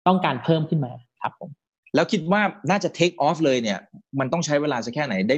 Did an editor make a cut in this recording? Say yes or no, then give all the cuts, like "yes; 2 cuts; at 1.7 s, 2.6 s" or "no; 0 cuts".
no; 0 cuts